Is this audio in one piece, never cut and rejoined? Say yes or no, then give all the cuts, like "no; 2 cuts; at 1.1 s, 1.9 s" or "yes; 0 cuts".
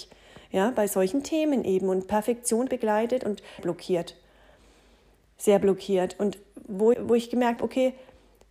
no; 4 cuts; at 2.7 s, 3.6 s, 6.9 s, 7.6 s